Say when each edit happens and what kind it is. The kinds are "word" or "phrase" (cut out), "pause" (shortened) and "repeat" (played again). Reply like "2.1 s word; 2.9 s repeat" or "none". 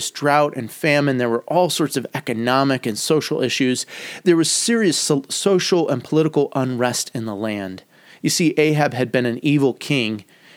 none